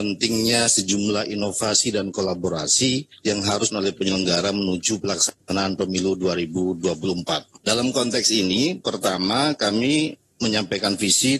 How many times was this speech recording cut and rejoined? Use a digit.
1